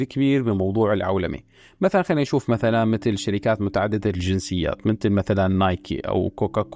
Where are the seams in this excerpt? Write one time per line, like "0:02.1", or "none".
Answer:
none